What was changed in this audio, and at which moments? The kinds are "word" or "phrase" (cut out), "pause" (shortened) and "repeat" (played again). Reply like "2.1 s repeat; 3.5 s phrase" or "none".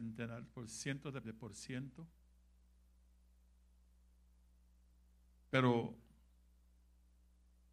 1.2 s word